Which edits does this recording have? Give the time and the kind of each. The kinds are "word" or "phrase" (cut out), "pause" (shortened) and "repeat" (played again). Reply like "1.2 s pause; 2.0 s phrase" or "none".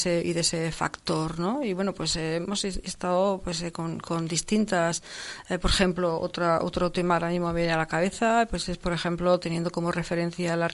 none